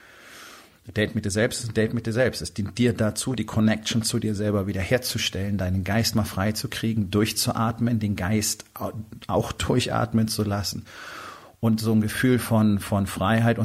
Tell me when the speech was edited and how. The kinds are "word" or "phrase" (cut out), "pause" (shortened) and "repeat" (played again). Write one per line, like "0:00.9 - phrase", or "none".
none